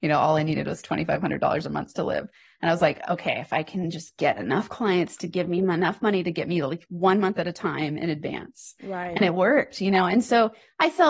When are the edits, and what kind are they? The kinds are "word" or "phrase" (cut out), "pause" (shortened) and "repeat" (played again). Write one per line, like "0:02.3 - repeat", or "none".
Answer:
none